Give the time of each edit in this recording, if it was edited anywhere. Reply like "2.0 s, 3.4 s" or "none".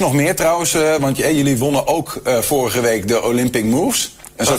none